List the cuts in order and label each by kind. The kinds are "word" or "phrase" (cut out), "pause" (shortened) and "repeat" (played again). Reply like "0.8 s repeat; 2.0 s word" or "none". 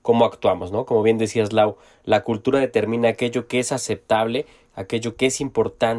none